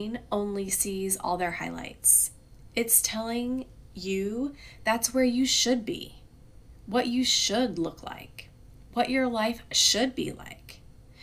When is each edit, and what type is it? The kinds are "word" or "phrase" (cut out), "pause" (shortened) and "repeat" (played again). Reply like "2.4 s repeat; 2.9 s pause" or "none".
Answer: none